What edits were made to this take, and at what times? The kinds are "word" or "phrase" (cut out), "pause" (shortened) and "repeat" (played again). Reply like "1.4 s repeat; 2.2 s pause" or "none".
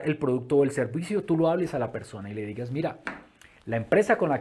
none